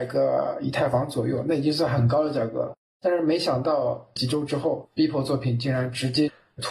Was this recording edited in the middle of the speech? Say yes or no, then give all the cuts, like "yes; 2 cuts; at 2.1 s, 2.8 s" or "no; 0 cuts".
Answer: no; 0 cuts